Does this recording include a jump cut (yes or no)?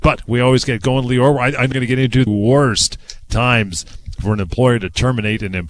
yes